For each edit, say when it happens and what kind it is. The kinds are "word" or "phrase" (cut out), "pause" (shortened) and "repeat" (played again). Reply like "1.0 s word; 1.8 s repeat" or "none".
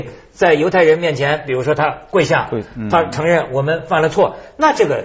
none

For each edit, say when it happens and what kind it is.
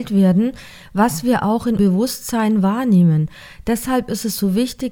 1.8 s word

